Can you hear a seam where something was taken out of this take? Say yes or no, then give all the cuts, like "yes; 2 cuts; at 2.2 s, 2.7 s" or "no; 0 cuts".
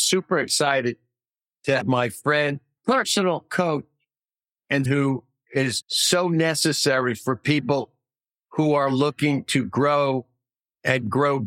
yes; 4 cuts; at 1.8 s, 2.8 s, 4.9 s, 5.8 s